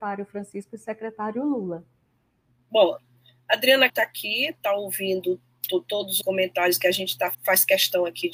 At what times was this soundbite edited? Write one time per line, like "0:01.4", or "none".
0:03.9
0:06.2
0:07.3